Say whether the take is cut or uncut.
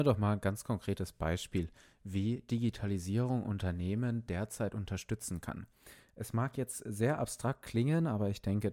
uncut